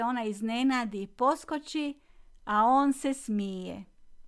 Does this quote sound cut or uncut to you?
uncut